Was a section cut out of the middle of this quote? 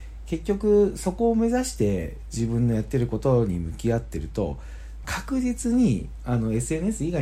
yes; 1 cut; at 5.0 s

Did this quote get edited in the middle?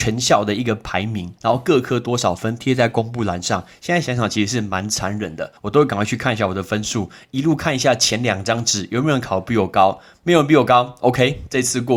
yes; 2 cuts; at 1.4 s, 5.6 s

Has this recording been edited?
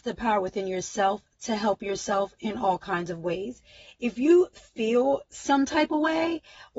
no; 0 cuts

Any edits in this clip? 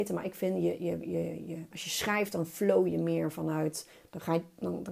no; 0 cuts

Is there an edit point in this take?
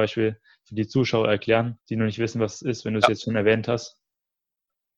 yes; 1 cut; at 1.8 s

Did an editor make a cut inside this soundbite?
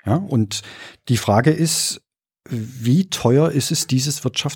no; 0 cuts

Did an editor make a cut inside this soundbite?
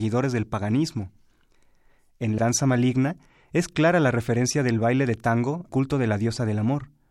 yes; 2 cuts; at 2.4 s, 5.7 s

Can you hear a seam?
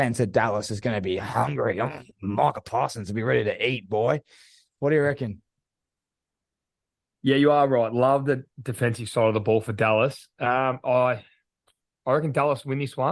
no; 0 cuts

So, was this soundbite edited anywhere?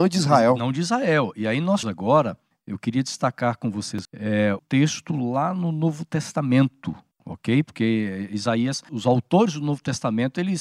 yes; 4 cuts; at 1.8 s, 4.0 s, 4.6 s, 8.9 s

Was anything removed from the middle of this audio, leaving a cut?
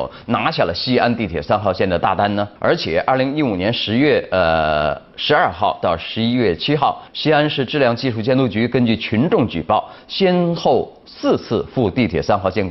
yes; 2 cuts; at 2.6 s, 7.1 s

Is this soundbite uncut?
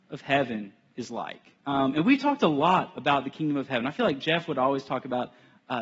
no; 1 cut; at 1.6 s

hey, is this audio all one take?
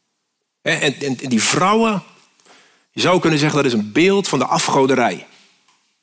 yes; 0 cuts

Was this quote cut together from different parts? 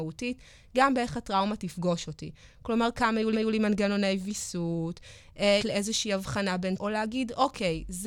yes; 3 cuts; at 3.3 s, 5.6 s, 6.8 s

